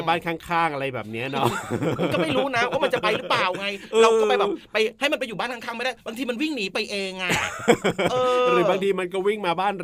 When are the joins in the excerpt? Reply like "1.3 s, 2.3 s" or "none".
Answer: 6.0 s